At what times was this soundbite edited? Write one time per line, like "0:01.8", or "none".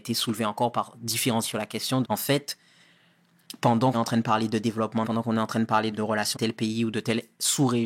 0:01.4
0:02.0
0:03.9
0:05.0
0:05.9
0:06.3